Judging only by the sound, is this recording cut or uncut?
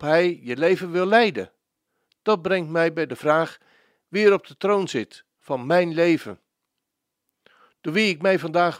uncut